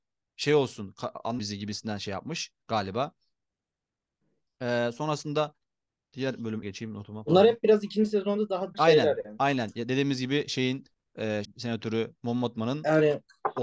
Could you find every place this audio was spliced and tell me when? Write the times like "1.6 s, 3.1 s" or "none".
1.4 s, 6.6 s, 8.7 s, 11.4 s